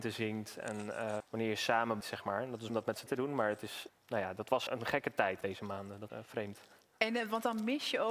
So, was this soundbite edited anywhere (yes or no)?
yes